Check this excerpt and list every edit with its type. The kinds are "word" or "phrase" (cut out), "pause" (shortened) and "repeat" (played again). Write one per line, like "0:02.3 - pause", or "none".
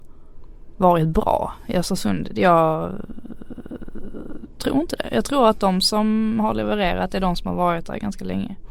none